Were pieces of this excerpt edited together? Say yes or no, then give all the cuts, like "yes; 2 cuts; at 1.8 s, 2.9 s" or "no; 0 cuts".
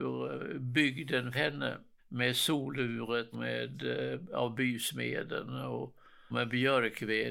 yes; 3 cuts; at 1.3 s, 3.3 s, 6.3 s